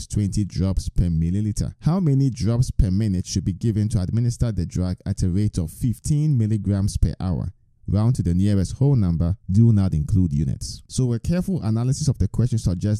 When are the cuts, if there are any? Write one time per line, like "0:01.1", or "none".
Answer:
0:01.8
0:09.4
0:10.9